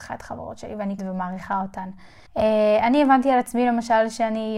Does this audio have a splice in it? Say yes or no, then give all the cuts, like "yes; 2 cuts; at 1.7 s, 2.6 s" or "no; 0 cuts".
yes; 2 cuts; at 1.0 s, 2.3 s